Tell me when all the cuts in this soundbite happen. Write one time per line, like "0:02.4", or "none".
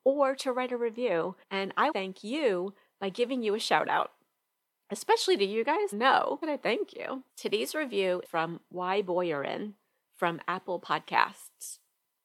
0:01.4
0:01.9
0:05.9
0:06.4
0:07.3
0:08.2

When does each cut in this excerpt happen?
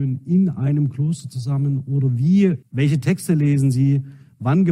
0:02.6

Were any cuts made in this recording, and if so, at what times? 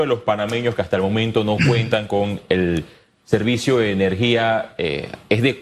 none

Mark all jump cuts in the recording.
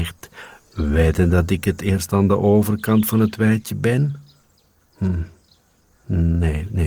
none

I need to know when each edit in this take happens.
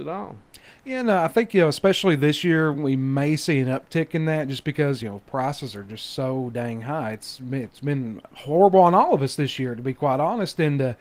none

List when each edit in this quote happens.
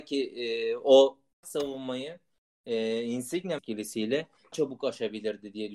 0:01.4
0:03.6
0:04.5

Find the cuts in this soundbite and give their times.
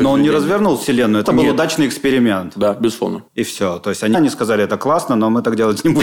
0:01.2
0:03.3
0:04.1

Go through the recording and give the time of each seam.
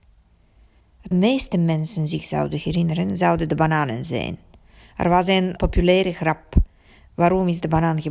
0:01.1
0:05.6

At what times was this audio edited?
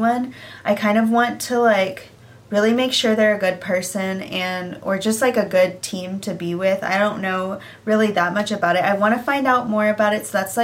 none

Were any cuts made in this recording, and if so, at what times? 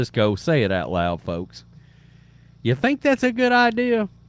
none

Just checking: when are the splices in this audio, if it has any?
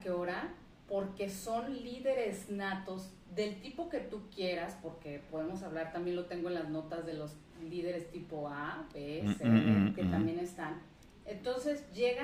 none

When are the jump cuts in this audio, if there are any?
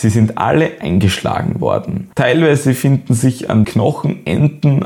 0:02.1
0:03.6

